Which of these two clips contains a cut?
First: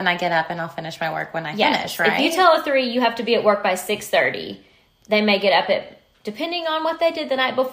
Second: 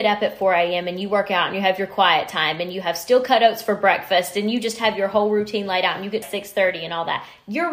second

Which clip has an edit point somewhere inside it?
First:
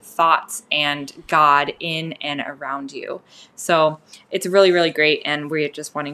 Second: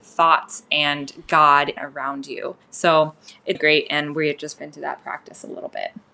second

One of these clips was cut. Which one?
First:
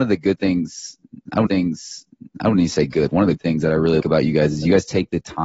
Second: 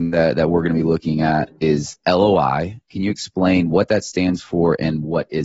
first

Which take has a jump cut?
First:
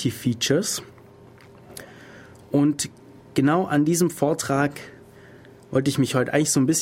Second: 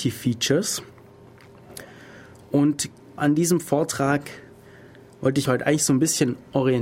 second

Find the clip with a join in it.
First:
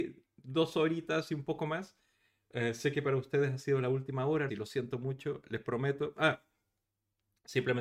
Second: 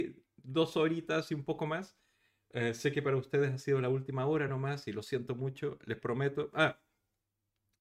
first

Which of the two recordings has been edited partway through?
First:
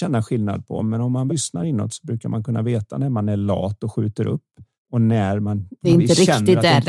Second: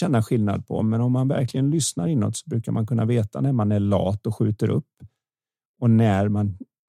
first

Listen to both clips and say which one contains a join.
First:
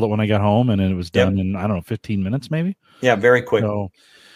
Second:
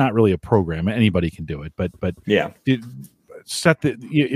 second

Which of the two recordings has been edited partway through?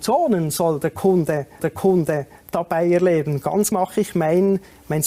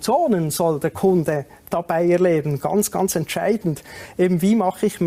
first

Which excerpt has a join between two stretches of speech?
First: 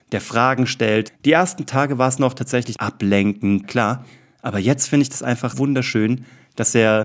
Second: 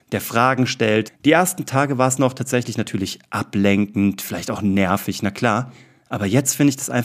first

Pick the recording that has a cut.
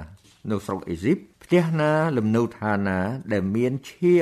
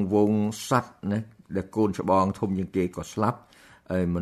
first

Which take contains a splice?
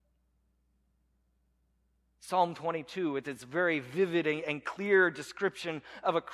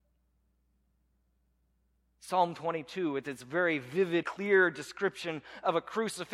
second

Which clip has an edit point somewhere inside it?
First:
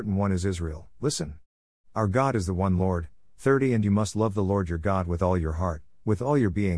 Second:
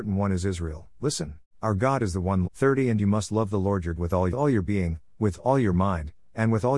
second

